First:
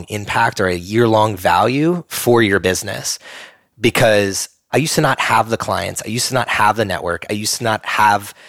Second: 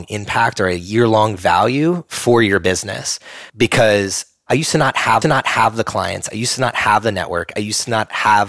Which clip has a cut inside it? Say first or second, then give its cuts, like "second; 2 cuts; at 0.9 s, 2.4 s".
second; 2 cuts; at 3.5 s, 5.2 s